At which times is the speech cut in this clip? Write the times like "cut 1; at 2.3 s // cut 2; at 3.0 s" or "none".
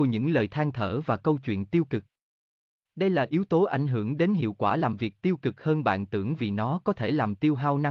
none